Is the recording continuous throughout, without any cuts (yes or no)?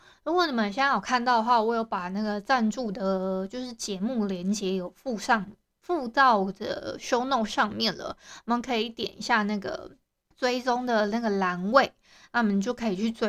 yes